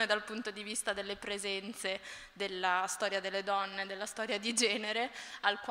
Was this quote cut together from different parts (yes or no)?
no